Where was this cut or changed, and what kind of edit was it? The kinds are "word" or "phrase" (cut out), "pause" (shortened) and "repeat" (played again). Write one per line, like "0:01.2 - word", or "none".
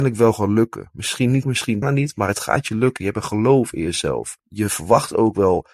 0:01.4 - word
0:01.8 - word
0:04.4 - pause